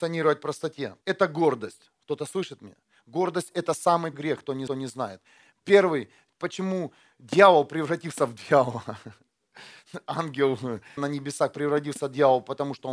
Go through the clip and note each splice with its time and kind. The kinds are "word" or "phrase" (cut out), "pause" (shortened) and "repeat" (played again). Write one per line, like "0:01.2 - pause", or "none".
0:01.0 - pause
0:04.1 - word
0:04.7 - repeat
0:11.0 - word